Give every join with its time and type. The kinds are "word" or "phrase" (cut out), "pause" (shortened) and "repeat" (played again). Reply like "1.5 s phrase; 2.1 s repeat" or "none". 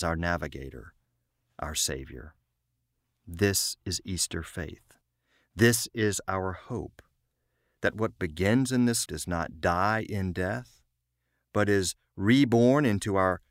9.1 s word